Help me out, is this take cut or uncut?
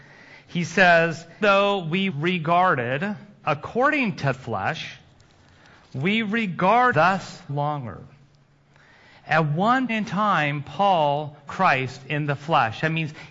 cut